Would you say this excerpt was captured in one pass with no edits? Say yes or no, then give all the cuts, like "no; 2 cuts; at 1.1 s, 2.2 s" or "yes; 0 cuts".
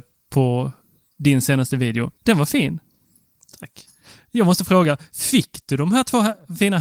no; 1 cut; at 2.2 s